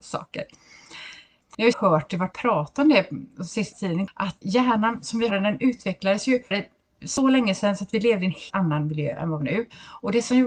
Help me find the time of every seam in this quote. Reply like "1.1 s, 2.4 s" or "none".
1.7 s, 2.3 s, 3.7 s, 4.4 s, 5.3 s, 6.5 s, 8.5 s, 9.4 s